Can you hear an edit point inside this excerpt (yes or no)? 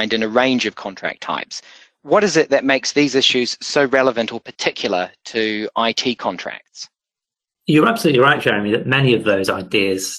no